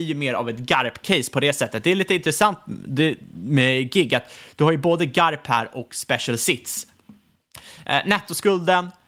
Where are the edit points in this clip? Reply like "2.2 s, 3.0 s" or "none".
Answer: none